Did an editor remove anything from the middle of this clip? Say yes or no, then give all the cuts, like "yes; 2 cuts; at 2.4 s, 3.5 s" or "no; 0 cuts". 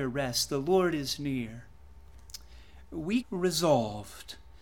yes; 1 cut; at 3.2 s